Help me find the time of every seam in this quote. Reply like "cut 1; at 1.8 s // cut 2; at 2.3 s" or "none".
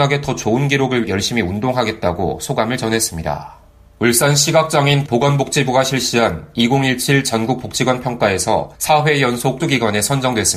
cut 1; at 1.0 s // cut 2; at 3.7 s // cut 3; at 5.1 s // cut 4; at 7.6 s // cut 5; at 8.7 s // cut 6; at 9.6 s